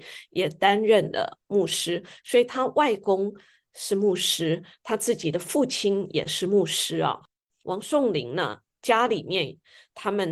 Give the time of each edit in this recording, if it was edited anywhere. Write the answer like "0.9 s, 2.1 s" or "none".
none